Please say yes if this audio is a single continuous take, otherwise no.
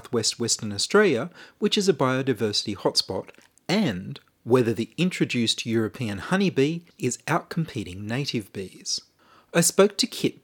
yes